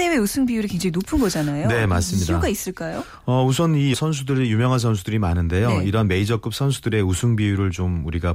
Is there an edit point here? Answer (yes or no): yes